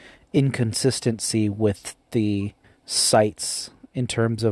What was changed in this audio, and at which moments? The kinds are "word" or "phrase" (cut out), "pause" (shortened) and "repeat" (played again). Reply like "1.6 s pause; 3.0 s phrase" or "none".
2.6 s pause